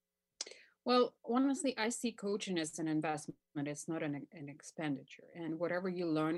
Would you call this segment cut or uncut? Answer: uncut